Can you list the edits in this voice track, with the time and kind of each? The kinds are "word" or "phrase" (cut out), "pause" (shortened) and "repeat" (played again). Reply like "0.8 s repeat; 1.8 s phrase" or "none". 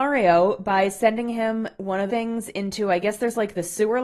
1.8 s word; 2.1 s phrase